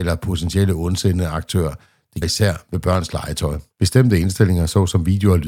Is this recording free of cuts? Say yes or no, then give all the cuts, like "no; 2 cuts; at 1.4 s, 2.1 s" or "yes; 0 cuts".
no; 2 cuts; at 2.2 s, 3.7 s